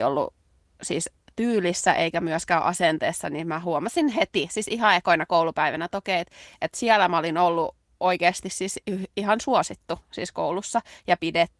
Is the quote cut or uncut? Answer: uncut